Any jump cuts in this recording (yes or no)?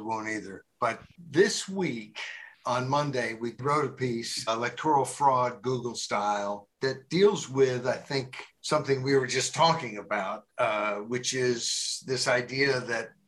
yes